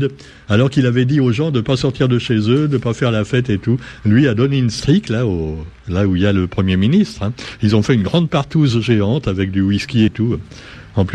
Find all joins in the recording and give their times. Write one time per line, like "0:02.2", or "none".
0:10.1

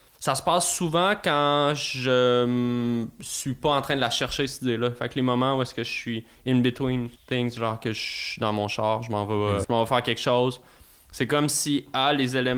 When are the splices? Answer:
0:07.2
0:09.6

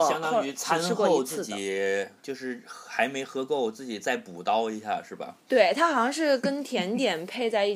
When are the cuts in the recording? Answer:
0:02.2

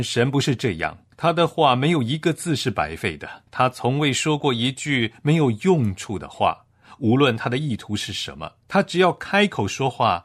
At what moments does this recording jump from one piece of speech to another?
0:01.1
0:03.5
0:08.6

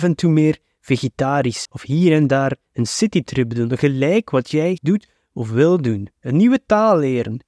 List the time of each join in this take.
0:01.6
0:04.8

